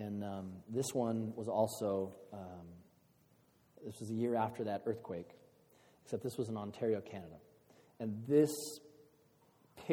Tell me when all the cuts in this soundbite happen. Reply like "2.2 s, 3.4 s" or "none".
none